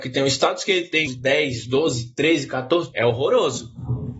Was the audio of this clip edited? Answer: yes; 2 cuts; at 1.1 s, 2.9 s

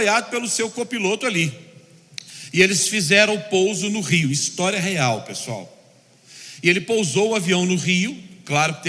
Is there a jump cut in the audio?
no; 0 cuts

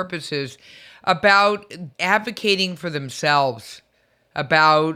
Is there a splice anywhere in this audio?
yes; 1 cut; at 1.9 s

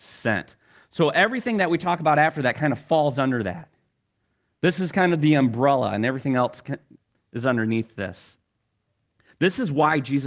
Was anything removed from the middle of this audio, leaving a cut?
no; 0 cuts

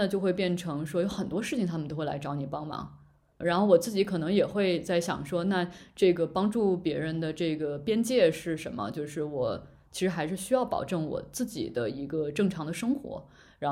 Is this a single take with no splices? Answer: yes; 0 cuts

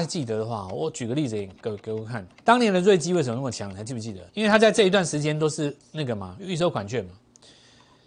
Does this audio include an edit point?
yes; 2 cuts; at 2.3 s, 4.3 s

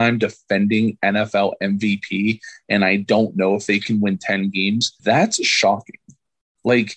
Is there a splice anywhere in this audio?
yes; 1 cut; at 5.0 s

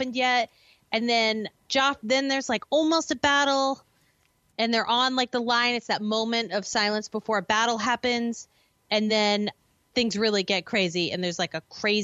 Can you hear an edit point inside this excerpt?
no; 0 cuts

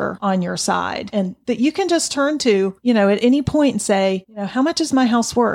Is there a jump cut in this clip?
no; 0 cuts

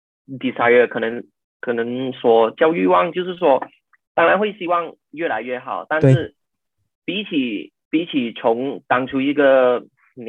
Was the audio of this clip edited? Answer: yes; 1 cut; at 7.0 s

